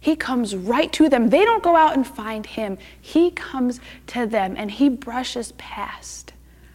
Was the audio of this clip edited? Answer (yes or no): no